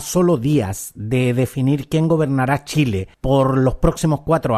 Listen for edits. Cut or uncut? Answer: uncut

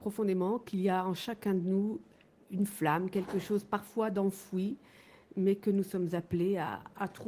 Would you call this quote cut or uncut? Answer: uncut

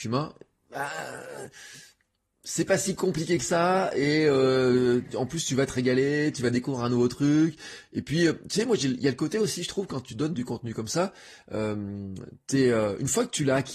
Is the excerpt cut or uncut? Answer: uncut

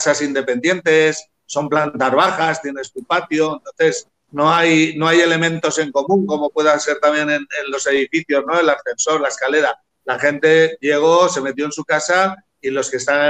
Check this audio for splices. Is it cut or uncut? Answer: uncut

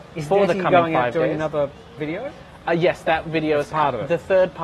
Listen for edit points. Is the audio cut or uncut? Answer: cut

